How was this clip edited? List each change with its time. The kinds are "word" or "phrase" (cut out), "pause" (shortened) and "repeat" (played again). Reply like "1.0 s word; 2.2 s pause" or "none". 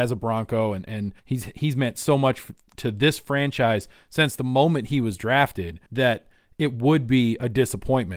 1.2 s pause; 5.9 s pause